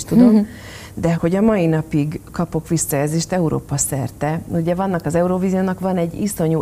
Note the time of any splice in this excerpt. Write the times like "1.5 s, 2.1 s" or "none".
1.1 s